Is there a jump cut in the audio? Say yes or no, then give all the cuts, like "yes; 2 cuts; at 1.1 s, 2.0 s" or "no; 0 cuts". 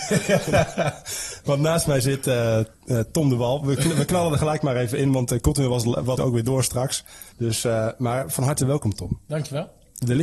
yes; 3 cuts; at 2.7 s, 6.2 s, 7.3 s